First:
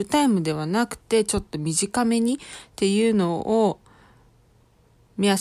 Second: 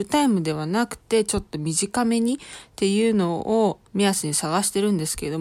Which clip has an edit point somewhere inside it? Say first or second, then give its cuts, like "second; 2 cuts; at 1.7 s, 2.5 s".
second; 1 cut; at 3.9 s